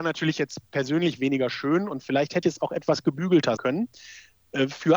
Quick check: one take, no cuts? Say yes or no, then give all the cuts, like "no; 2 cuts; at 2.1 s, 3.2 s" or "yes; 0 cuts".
no; 2 cuts; at 2.4 s, 3.6 s